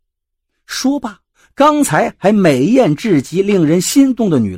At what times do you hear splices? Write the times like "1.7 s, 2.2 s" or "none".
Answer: 1.3 s